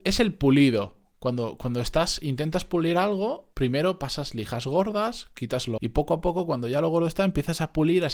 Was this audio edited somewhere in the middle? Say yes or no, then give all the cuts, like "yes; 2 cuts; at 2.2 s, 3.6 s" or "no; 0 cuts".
yes; 2 cuts; at 3.5 s, 5.8 s